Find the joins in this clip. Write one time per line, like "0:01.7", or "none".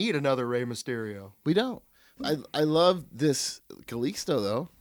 none